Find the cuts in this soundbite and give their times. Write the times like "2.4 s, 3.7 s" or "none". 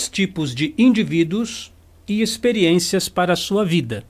none